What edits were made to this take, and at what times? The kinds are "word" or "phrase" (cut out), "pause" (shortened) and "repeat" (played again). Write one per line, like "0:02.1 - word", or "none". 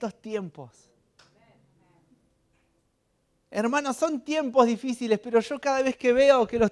none